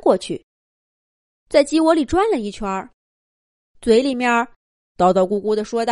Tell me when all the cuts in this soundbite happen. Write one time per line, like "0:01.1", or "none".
none